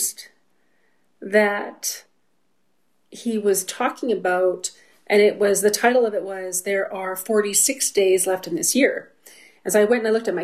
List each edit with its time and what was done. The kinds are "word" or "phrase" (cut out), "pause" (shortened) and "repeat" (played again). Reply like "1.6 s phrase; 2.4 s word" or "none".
none